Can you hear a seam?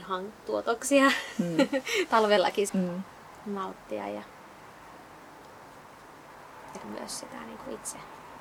yes; 2 cuts; at 2.7 s, 6.8 s

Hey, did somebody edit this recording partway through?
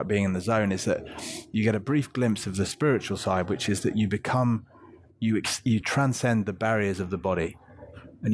no; 0 cuts

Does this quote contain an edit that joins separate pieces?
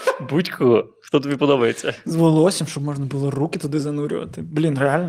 no; 0 cuts

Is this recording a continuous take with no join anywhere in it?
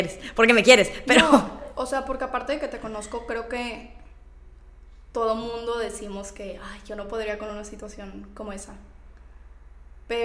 yes; 0 cuts

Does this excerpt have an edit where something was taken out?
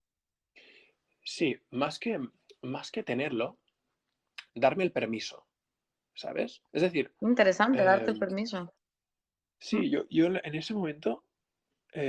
yes; 3 cuts; at 4.5 s, 6.7 s, 10.1 s

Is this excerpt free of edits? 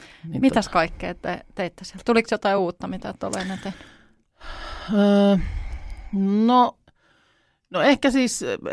yes; 0 cuts

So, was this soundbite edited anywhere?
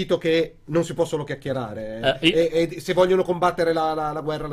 no; 0 cuts

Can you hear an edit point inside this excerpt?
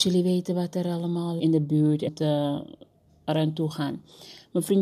yes; 2 cuts; at 1.4 s, 2.1 s

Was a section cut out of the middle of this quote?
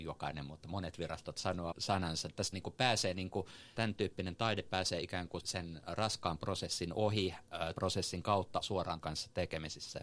yes; 8 cuts; at 1.3 s, 1.7 s, 2.5 s, 3.8 s, 5.4 s, 7.7 s, 8.6 s, 9.0 s

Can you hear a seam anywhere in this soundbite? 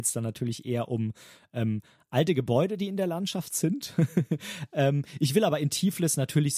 no; 0 cuts

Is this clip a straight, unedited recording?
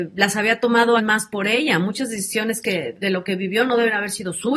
no; 2 cuts; at 1.0 s, 2.9 s

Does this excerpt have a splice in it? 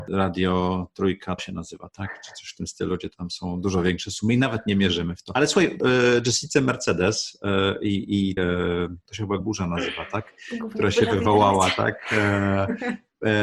yes; 4 cuts; at 1.4 s, 5.8 s, 8.4 s, 9.4 s

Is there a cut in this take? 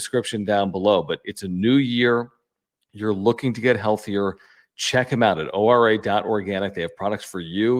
no; 0 cuts

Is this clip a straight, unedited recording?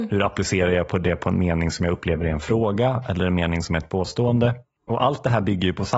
yes; 0 cuts

